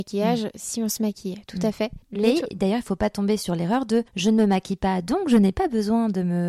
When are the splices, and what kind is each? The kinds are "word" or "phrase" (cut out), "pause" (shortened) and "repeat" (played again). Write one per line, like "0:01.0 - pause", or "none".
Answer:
0:02.0 - pause
0:04.1 - pause